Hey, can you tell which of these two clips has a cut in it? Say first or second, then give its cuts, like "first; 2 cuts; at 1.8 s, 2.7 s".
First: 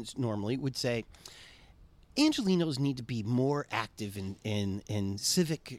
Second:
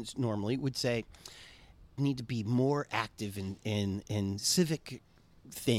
second; 1 cut; at 2.0 s